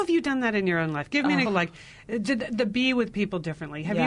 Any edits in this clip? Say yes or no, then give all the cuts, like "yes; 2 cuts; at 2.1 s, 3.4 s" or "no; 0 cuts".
yes; 1 cut; at 1.4 s